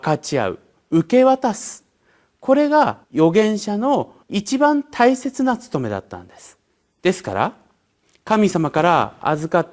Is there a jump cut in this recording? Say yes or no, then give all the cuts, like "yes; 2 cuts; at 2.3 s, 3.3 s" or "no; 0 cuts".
yes; 3 cuts; at 3.0 s, 4.2 s, 6.7 s